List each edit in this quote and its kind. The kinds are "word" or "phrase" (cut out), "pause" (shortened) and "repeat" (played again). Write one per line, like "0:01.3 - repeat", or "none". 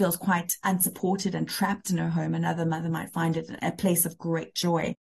none